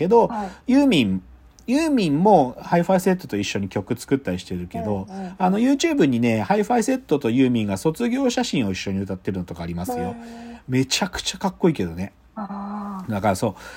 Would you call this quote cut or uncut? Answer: uncut